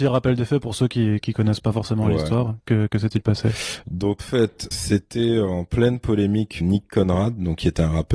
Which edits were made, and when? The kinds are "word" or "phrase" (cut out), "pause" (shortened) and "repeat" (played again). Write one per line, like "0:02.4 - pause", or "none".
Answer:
0:04.2 - word
0:04.7 - word
0:06.6 - word